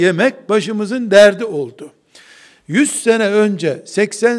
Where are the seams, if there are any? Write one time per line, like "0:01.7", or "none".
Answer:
none